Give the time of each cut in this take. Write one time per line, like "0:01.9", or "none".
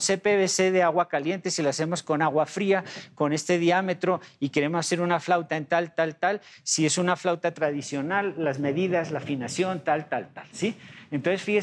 none